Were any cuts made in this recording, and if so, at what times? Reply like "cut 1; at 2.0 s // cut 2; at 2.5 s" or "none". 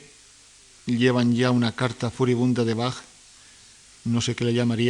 none

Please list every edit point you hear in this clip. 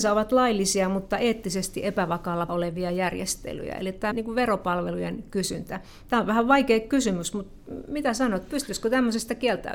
cut 1; at 2.5 s // cut 2; at 4.1 s

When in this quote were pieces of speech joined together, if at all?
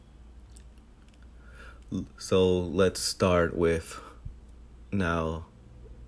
none

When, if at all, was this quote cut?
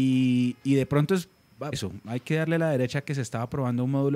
cut 1; at 1.7 s

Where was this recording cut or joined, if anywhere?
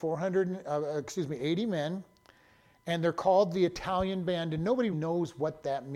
cut 1; at 4.9 s

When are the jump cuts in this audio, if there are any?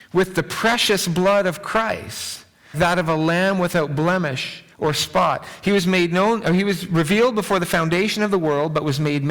cut 1; at 2.7 s // cut 2; at 4.7 s

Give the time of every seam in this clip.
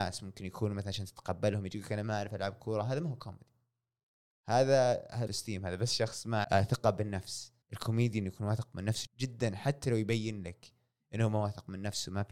cut 1; at 5.3 s // cut 2; at 6.4 s // cut 3; at 7.6 s // cut 4; at 9.1 s

